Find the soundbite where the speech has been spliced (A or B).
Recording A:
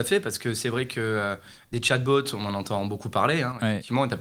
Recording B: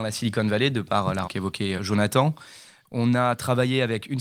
B